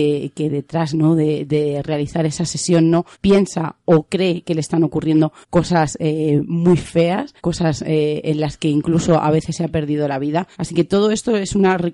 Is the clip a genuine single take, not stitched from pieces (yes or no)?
no